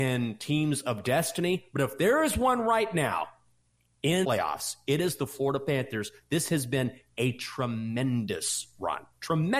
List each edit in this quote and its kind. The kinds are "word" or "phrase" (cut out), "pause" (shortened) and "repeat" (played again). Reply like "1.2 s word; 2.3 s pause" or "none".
4.2 s phrase

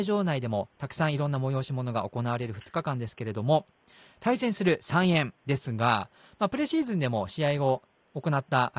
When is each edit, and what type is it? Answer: 5.4 s pause

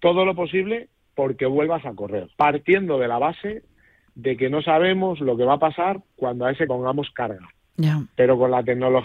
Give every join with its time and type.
0.9 s pause; 2.3 s pause; 6.7 s phrase

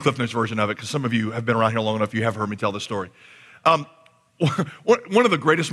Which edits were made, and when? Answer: none

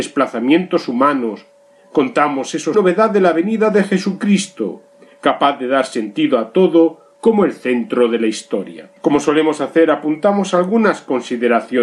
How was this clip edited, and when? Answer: 2.7 s phrase; 9.0 s pause

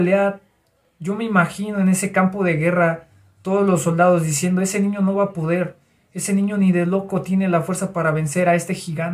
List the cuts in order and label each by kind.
none

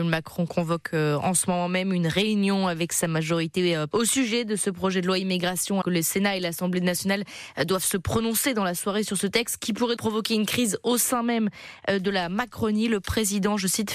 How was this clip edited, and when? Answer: 3.9 s word; 5.8 s word; 10.0 s word

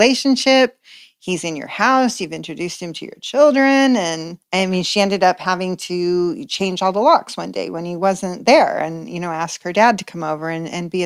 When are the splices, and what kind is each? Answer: none

